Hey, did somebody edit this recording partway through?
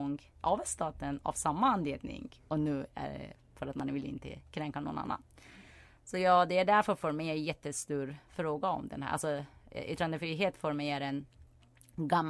no; 0 cuts

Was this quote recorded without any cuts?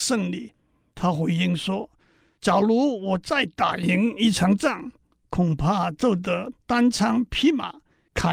yes; 0 cuts

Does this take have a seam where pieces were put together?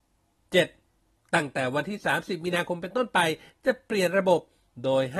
no; 0 cuts

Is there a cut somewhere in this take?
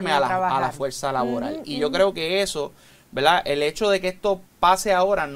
no; 0 cuts

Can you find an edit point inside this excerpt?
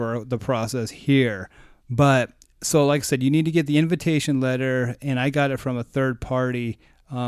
no; 0 cuts

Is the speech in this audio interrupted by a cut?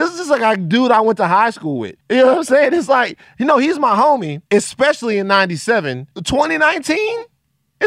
yes; 3 cuts; at 2.0 s, 4.5 s, 6.1 s

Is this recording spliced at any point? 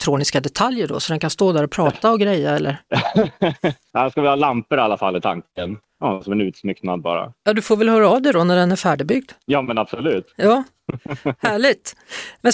yes; 1 cut; at 3.9 s

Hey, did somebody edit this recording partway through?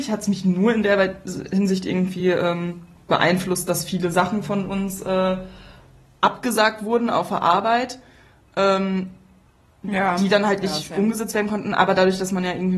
no; 0 cuts

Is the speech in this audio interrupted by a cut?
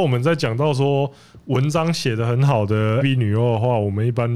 yes; 1 cut; at 3.0 s

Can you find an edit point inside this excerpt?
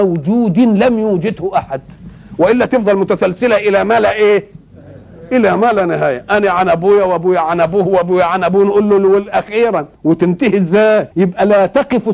yes; 2 cuts; at 10.0 s, 11.1 s

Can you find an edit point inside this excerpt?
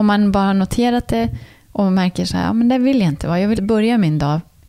yes; 1 cut; at 3.6 s

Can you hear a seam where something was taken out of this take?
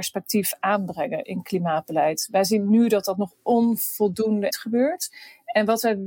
yes; 1 cut; at 4.5 s

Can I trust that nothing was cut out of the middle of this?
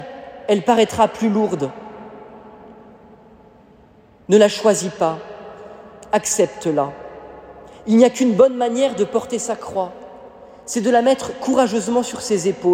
yes; 0 cuts

